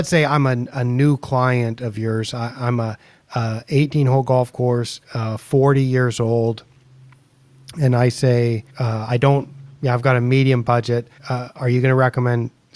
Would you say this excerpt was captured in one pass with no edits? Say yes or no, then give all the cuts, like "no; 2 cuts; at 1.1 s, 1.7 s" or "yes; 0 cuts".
no; 3 cuts; at 5.0 s, 8.7 s, 11.2 s